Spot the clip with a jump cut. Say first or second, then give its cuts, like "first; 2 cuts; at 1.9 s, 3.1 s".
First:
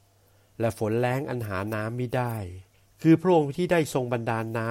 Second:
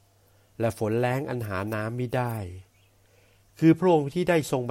first; 1 cut; at 2.7 s